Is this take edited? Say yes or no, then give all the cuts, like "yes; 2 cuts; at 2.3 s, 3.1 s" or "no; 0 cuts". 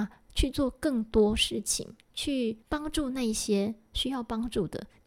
yes; 1 cut; at 2.6 s